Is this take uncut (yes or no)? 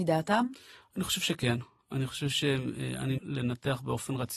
no